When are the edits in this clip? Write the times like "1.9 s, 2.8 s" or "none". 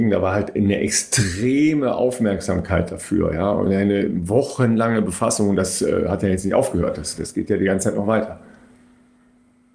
none